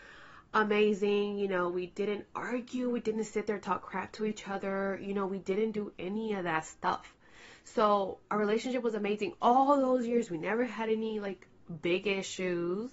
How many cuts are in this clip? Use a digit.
1